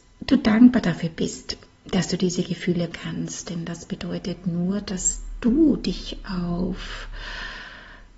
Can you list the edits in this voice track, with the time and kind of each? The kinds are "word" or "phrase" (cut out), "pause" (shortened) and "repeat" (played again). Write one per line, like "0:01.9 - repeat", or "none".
0:02.9 - word